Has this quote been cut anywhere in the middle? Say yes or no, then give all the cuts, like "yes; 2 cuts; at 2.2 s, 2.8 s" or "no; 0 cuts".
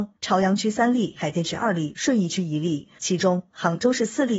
yes; 1 cut; at 3.0 s